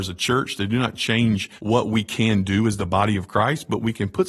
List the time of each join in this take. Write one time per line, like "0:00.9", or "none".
0:01.6